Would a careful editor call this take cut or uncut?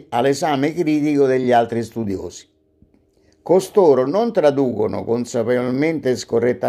uncut